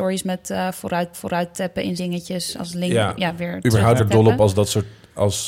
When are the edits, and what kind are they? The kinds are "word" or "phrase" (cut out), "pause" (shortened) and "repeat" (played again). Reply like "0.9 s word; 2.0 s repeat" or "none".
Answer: 1.1 s repeat; 2.0 s word; 2.6 s word; 4.0 s phrase